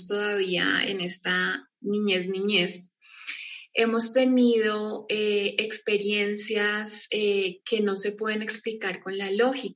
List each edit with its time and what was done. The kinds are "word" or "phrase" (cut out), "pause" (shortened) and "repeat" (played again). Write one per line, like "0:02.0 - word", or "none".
none